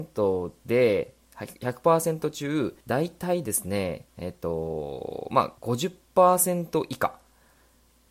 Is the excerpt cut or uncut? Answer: cut